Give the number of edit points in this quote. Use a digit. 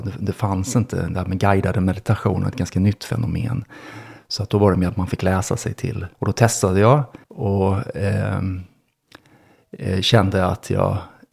2